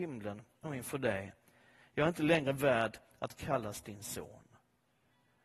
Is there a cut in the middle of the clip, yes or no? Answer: no